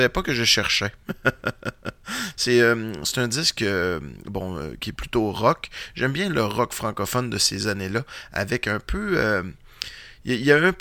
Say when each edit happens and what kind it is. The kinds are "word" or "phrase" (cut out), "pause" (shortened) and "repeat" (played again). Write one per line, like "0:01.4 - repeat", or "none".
none